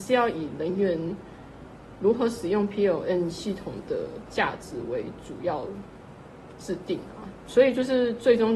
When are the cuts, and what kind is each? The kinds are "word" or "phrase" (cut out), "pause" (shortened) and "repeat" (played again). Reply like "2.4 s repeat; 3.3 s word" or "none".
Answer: none